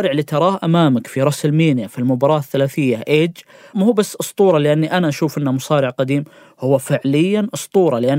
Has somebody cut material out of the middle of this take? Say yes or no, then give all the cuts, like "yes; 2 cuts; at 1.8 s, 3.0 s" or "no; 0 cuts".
no; 0 cuts